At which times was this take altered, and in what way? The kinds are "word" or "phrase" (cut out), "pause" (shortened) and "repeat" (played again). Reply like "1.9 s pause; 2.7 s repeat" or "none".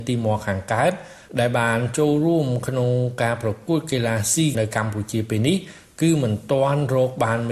4.5 s word